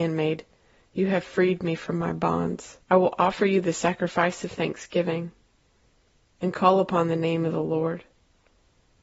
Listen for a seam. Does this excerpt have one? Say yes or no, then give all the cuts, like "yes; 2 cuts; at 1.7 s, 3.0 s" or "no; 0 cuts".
yes; 1 cut; at 2.8 s